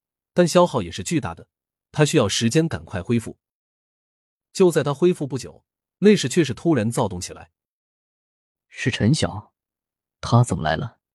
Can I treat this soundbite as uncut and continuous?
yes; 0 cuts

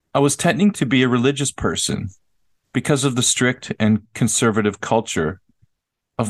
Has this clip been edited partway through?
no; 0 cuts

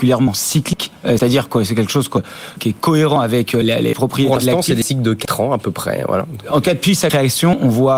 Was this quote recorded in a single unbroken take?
no; 2 cuts; at 2.6 s, 3.6 s

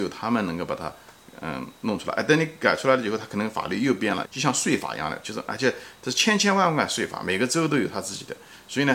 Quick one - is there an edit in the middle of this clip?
yes; 1 cut; at 4.2 s

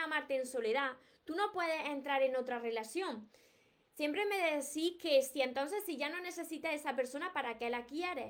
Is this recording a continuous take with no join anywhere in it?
yes; 0 cuts

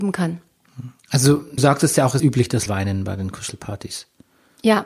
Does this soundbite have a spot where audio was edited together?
yes; 3 cuts; at 1.6 s, 2.2 s, 2.7 s

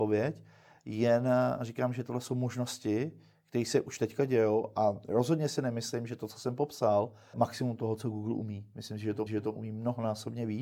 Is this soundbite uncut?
no; 2 cuts; at 7.3 s, 9.3 s

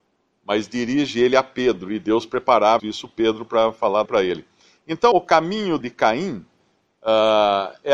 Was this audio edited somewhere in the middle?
yes; 4 cuts; at 2.8 s, 4.1 s, 5.1 s, 5.8 s

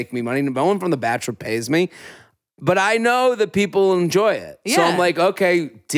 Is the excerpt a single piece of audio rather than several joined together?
yes; 0 cuts

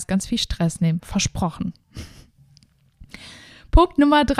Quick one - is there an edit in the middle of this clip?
no; 0 cuts

